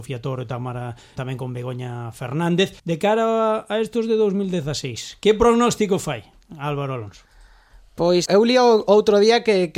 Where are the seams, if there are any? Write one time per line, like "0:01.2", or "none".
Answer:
0:01.2
0:02.8
0:08.3